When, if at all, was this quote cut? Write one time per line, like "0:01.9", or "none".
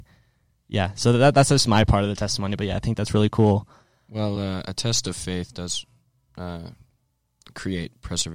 none